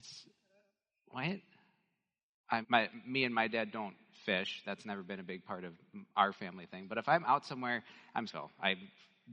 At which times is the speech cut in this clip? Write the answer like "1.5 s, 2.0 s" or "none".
2.6 s, 6.1 s, 8.3 s